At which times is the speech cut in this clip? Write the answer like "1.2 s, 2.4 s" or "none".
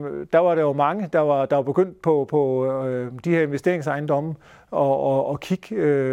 none